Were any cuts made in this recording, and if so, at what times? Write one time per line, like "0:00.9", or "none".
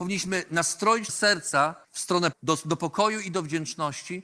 0:01.1
0:01.8
0:02.3